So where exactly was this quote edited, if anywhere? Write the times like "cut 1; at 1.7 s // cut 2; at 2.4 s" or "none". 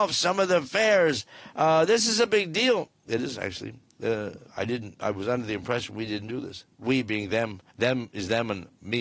cut 1; at 4.5 s // cut 2; at 7.7 s